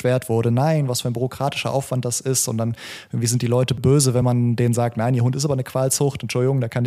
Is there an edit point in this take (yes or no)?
no